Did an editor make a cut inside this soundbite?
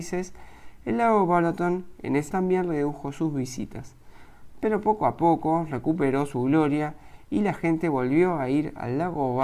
yes; 1 cut; at 2.3 s

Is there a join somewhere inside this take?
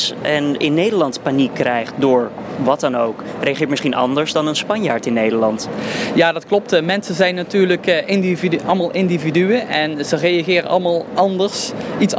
no; 0 cuts

